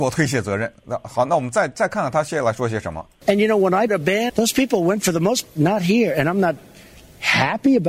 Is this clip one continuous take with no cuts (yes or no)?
no